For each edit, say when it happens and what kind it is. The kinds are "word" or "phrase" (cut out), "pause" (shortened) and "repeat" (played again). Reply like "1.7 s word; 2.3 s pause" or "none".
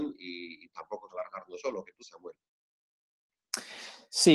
1.1 s word; 1.6 s word; 2.0 s word